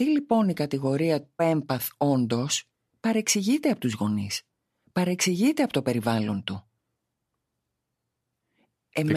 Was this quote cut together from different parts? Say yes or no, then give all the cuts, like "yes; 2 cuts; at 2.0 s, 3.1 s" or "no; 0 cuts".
yes; 1 cut; at 1.4 s